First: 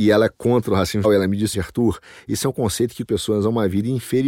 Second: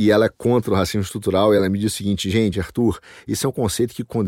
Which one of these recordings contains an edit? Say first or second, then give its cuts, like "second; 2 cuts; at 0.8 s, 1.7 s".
first; 3 cuts; at 1.0 s, 1.5 s, 3.0 s